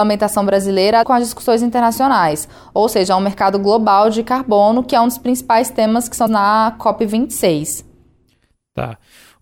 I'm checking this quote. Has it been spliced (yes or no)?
yes